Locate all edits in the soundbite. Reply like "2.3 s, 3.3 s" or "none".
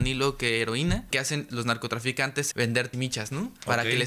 1.1 s, 1.5 s, 2.5 s, 2.9 s